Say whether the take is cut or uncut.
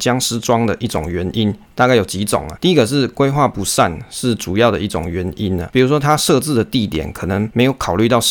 uncut